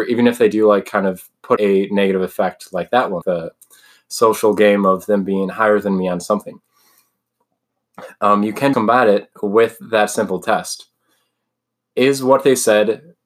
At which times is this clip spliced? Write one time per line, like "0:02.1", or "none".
0:01.6
0:03.2
0:08.7